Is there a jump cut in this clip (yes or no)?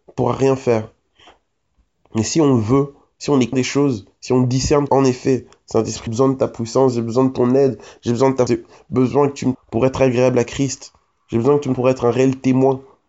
yes